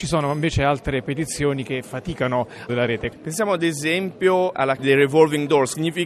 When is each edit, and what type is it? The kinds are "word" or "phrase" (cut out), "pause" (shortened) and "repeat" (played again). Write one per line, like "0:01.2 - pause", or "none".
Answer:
0:02.7 - phrase
0:04.8 - word